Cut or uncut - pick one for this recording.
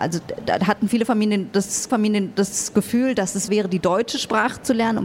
cut